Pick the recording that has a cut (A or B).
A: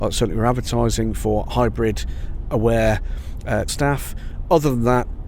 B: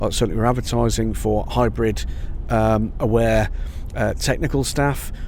A